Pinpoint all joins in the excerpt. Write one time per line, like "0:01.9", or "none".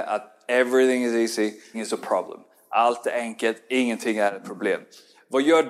0:01.7